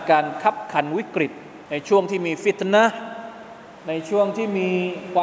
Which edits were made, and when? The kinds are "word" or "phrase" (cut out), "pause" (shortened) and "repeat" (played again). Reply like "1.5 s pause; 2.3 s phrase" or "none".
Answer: 1.7 s pause; 3.8 s pause

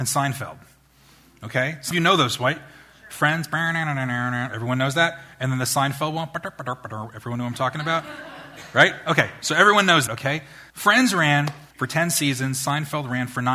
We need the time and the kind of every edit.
1.9 s word; 10.1 s word; 10.7 s pause; 11.7 s pause

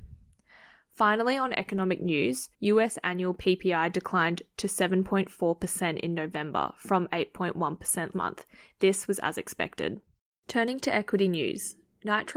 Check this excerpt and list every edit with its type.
2.5 s pause; 8.1 s word

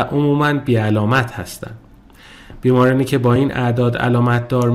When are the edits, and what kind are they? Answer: none

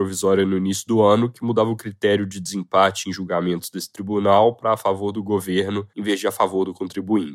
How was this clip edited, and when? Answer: 5.9 s pause

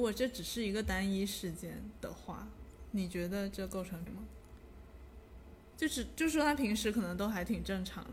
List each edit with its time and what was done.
4.1 s word

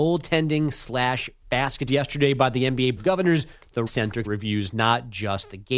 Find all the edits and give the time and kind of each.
1.9 s phrase; 3.0 s word; 3.9 s word; 4.3 s word

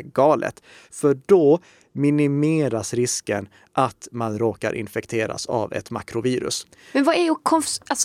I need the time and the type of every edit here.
none

